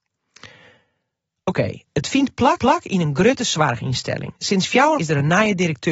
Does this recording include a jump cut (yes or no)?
yes